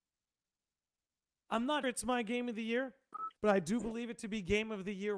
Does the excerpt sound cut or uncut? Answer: cut